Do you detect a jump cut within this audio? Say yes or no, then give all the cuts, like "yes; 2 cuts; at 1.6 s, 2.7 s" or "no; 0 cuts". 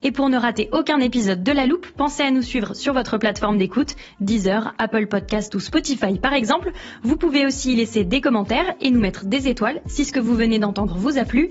no; 0 cuts